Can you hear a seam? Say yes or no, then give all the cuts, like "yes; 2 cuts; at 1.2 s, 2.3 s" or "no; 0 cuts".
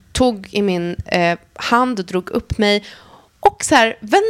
no; 0 cuts